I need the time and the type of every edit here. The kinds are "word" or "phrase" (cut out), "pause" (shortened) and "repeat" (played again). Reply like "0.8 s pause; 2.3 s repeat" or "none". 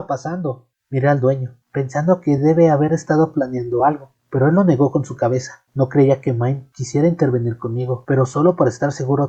none